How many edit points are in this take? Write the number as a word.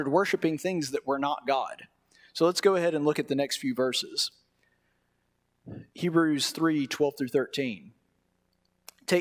zero